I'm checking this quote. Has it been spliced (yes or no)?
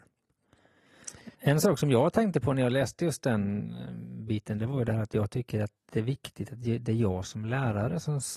yes